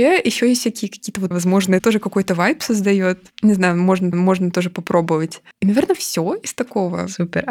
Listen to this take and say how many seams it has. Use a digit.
4